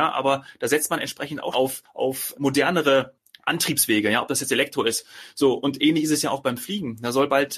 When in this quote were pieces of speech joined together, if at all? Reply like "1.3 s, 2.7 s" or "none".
1.5 s, 2.3 s